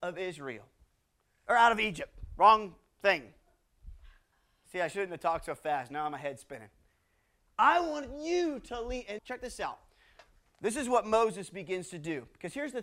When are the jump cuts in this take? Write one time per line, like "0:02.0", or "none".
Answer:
0:09.2